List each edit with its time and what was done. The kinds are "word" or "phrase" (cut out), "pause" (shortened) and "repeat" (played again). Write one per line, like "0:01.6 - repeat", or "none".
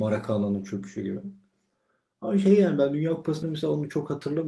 0:03.4 - word